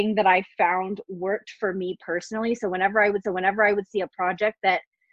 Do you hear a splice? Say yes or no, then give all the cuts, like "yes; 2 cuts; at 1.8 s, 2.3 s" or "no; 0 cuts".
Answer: yes; 1 cut; at 3.2 s